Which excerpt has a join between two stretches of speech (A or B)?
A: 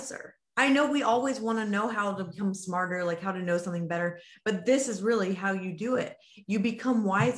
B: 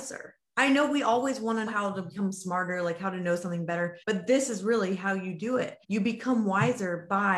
B